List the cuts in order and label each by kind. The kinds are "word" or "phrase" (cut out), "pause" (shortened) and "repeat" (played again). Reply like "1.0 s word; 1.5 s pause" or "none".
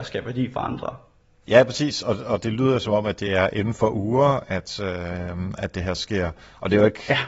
none